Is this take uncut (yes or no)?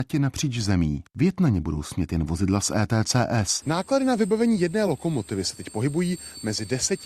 yes